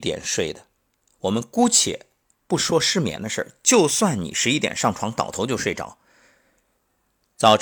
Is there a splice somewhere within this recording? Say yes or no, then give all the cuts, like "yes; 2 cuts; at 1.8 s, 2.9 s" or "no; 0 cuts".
no; 0 cuts